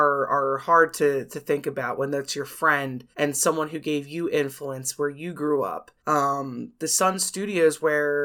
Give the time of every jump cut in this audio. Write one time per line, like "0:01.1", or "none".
0:03.1
0:06.0